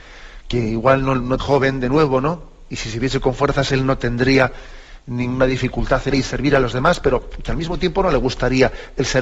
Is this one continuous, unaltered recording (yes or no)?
no